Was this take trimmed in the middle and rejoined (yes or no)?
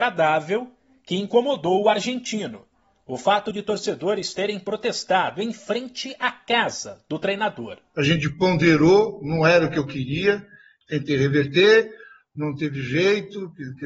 no